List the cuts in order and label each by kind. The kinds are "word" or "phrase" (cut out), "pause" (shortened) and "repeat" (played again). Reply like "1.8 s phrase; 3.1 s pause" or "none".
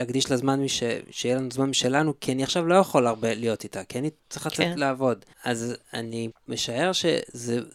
4.2 s pause; 5.3 s pause; 6.3 s word